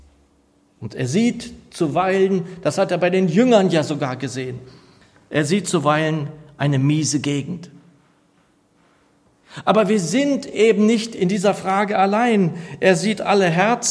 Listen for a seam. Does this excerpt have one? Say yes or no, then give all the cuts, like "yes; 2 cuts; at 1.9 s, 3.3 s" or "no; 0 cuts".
no; 0 cuts